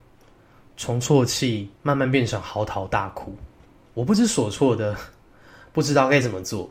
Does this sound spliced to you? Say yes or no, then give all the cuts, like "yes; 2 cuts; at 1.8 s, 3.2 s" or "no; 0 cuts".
yes; 2 cuts; at 1.8 s, 3.6 s